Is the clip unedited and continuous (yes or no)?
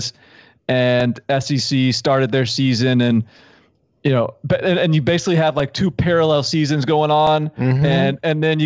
yes